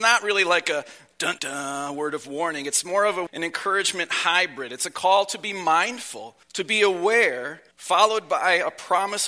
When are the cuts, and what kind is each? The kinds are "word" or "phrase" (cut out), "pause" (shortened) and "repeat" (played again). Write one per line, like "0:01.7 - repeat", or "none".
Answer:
0:01.4 - word
0:03.3 - word
0:06.4 - pause
0:07.7 - pause